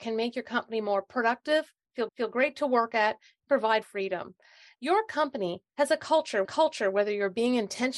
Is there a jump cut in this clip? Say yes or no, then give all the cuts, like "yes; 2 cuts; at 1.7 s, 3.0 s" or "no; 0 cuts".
yes; 3 cuts; at 2.1 s, 3.8 s, 6.4 s